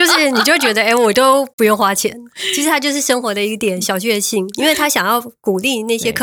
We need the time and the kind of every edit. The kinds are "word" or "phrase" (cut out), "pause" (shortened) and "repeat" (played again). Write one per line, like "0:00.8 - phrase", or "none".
0:01.5 - pause